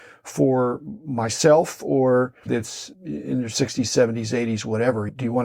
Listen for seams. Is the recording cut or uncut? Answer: cut